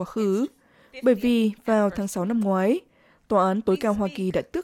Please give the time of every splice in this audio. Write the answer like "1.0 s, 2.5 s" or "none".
none